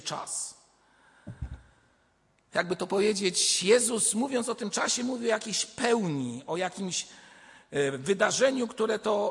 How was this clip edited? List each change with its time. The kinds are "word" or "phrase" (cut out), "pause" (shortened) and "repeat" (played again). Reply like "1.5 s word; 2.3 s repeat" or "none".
none